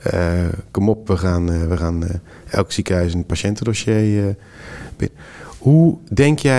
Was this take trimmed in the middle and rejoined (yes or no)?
no